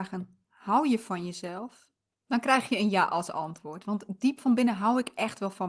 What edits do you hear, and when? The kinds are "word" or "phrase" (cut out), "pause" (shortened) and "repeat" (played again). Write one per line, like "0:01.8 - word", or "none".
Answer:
none